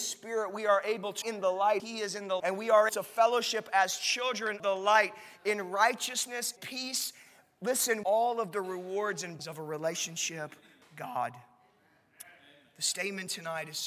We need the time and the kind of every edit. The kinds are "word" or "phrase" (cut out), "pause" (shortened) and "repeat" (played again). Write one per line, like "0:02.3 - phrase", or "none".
0:01.2 - word
0:01.8 - word
0:02.4 - word
0:02.9 - word
0:04.6 - word
0:06.6 - word
0:08.0 - word
0:09.4 - word
0:10.8 - word